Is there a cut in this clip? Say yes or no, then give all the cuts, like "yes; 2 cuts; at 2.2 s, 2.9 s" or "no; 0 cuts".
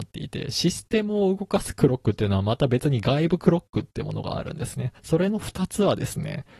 yes; 1 cut; at 5.0 s